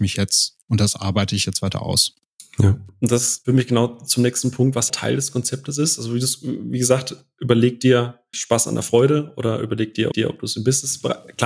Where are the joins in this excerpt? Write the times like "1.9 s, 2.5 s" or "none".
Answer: 4.9 s, 8.3 s, 10.1 s